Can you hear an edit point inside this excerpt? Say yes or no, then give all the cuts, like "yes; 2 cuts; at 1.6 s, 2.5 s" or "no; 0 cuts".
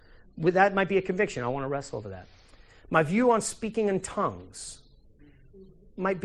no; 0 cuts